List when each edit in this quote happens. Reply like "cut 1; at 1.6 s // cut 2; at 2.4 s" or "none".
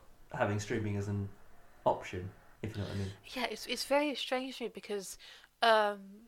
cut 1; at 2.6 s